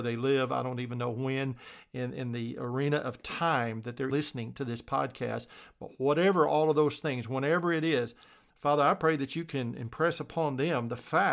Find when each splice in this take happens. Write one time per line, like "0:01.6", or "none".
0:04.1